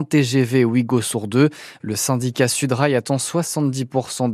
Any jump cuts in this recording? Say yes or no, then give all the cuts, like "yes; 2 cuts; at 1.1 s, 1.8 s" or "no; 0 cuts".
no; 0 cuts